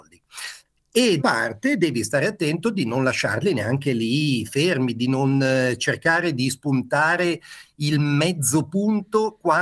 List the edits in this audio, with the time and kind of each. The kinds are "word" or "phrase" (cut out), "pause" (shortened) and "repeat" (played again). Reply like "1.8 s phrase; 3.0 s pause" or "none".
1.2 s word

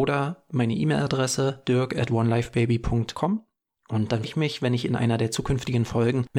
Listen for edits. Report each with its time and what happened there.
4.2 s word

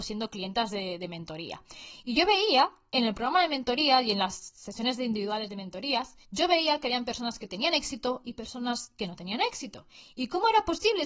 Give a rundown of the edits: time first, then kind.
6.2 s pause

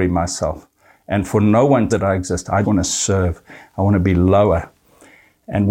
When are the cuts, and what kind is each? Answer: 1.9 s phrase; 2.6 s word

